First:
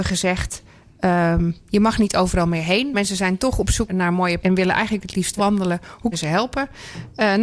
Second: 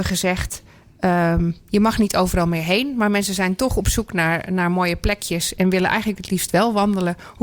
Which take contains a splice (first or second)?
first